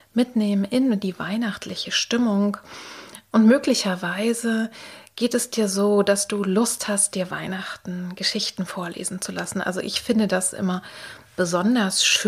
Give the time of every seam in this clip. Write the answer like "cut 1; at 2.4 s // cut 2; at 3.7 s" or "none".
none